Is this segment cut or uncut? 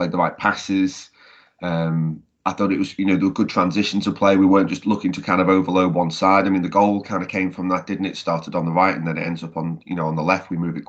uncut